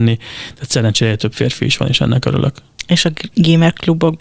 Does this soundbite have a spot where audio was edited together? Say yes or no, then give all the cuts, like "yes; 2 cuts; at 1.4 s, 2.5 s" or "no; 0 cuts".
no; 0 cuts